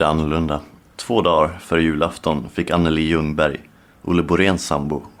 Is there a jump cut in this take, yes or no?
no